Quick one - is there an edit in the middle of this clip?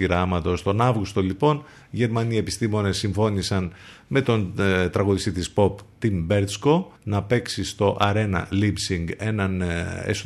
yes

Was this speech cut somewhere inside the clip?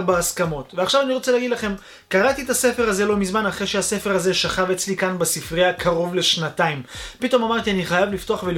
no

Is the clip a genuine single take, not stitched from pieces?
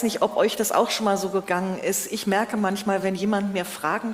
yes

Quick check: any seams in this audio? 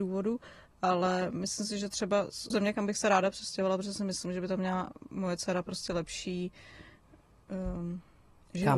yes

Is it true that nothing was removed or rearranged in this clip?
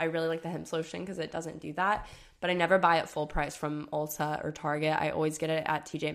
yes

